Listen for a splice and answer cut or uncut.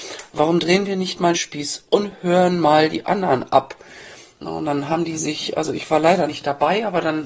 cut